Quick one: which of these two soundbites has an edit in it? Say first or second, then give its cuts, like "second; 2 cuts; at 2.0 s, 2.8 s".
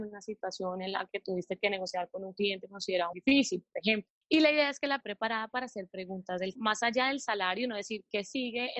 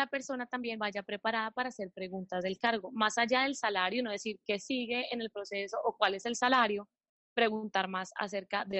first; 3 cuts; at 3.1 s, 5.0 s, 6.6 s